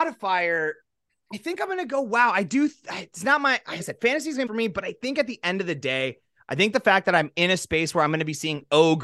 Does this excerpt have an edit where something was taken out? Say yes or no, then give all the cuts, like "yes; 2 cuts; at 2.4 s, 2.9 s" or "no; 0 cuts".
yes; 2 cuts; at 3.8 s, 4.5 s